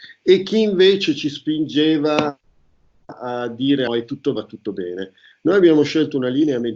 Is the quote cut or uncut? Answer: cut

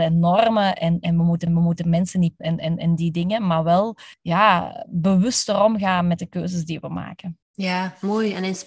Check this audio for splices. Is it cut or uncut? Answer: cut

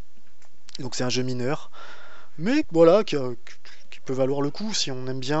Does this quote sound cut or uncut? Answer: cut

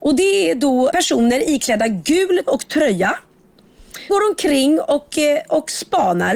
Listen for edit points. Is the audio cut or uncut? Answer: cut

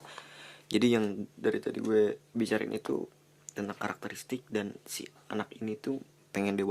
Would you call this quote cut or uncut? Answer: uncut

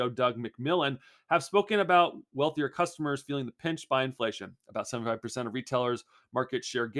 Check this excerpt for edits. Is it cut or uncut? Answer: uncut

